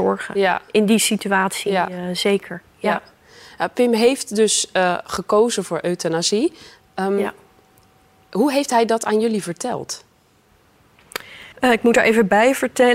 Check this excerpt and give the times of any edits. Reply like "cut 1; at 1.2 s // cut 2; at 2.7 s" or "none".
cut 1; at 11.5 s